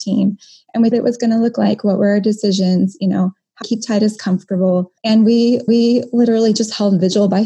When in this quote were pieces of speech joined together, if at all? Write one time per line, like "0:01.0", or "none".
0:00.9
0:03.6
0:05.0
0:05.7